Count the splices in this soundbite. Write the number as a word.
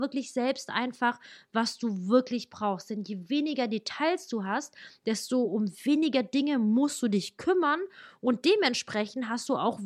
zero